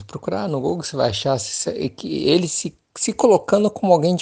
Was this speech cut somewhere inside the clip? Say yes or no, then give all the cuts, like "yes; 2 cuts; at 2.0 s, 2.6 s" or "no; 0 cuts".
no; 0 cuts